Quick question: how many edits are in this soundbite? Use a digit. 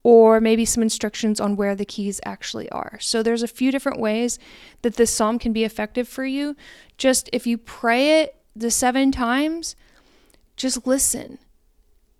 0